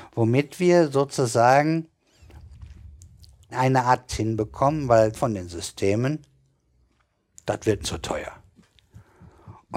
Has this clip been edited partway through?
yes; 4 cuts; at 3.5 s, 4.1 s, 5.1 s, 7.8 s

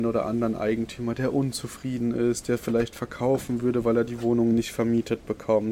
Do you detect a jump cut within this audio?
no; 0 cuts

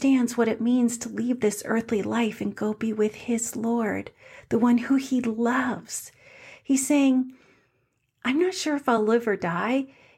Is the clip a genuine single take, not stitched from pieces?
yes; 0 cuts

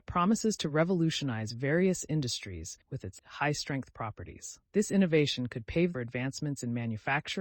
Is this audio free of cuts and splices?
no; 4 cuts; at 2.8 s, 3.2 s, 4.6 s, 5.9 s

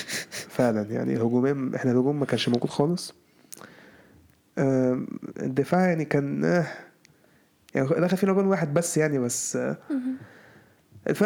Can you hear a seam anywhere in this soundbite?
no; 0 cuts

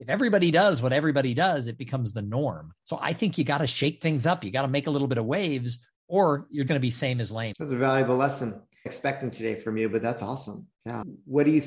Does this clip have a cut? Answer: yes; 5 cuts; at 2.8 s, 5.9 s, 6.7 s, 8.9 s, 10.7 s

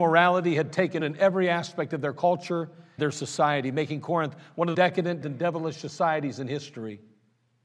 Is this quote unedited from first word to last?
no; 4 cuts; at 1.0 s, 3.0 s, 4.7 s, 5.2 s

